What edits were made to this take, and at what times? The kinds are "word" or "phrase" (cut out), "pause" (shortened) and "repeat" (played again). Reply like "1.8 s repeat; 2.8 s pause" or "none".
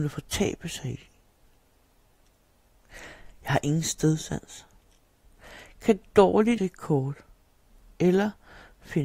6.6 s word